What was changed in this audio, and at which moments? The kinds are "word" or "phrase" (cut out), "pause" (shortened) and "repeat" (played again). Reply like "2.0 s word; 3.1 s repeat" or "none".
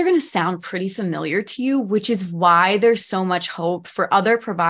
none